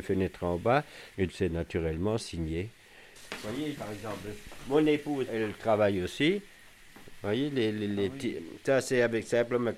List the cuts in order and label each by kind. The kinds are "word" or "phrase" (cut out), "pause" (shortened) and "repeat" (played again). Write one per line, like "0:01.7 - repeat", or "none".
0:01.3 - word
0:02.2 - word
0:03.7 - word
0:05.3 - word